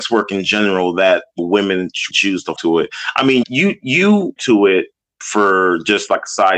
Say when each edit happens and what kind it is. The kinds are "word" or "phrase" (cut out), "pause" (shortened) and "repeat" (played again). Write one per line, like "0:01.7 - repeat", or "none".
0:01.4 - word
0:02.1 - word
0:02.6 - word
0:03.4 - word
0:04.4 - word